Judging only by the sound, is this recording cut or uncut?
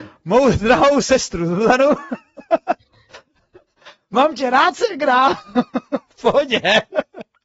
uncut